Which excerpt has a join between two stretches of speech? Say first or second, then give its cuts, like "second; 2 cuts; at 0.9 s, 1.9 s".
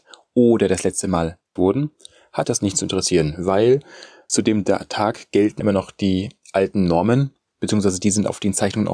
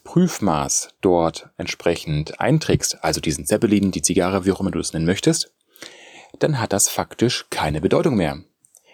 first; 4 cuts; at 1.6 s, 2.4 s, 4.3 s, 5.6 s